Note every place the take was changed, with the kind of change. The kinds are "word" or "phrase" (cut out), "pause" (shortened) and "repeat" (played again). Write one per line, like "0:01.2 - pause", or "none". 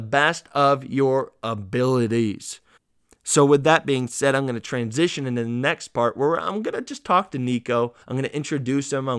0:02.8 - pause
0:08.0 - pause